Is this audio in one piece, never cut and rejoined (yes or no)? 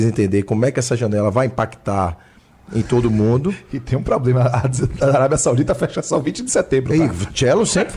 yes